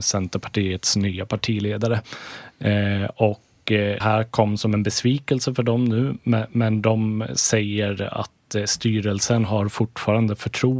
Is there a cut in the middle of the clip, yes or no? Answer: yes